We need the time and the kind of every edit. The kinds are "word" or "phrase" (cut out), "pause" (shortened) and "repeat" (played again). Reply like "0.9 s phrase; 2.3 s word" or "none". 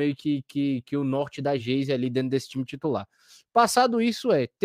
none

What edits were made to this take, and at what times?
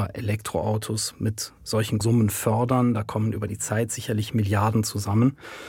2.0 s word

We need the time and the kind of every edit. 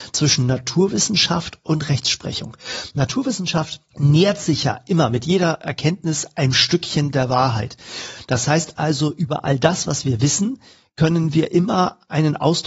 none

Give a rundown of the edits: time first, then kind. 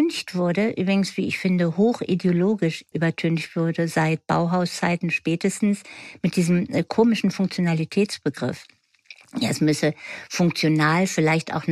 2.9 s word

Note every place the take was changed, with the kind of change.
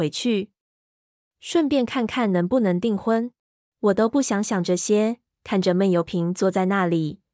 3.5 s pause

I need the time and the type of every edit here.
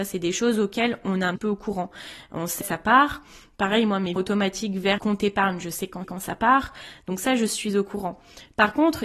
1.4 s word; 2.6 s phrase; 4.2 s word; 5.0 s word; 6.0 s repeat

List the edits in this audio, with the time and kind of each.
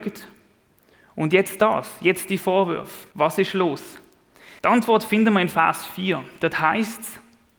3.1 s pause; 4.6 s pause

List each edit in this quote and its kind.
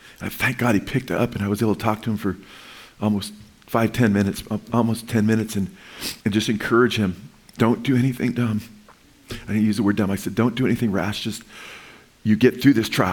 6.2 s pause

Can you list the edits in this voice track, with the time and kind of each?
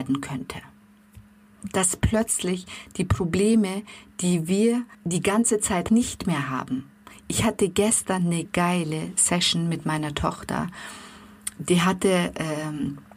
4.9 s pause; 5.9 s phrase; 8.5 s word

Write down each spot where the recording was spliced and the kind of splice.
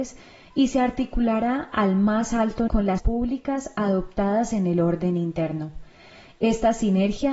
2.7 s word; 3.0 s word

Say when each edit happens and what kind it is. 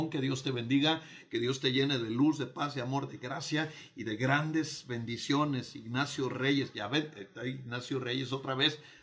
none

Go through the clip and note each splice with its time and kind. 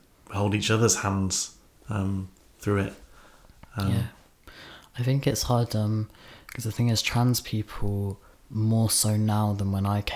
8.3 s pause

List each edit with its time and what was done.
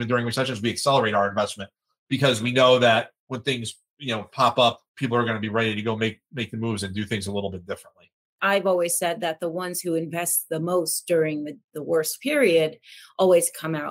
4.9 s pause; 11.6 s pause

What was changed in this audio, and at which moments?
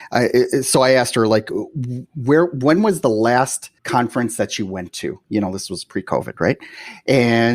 3.8 s pause

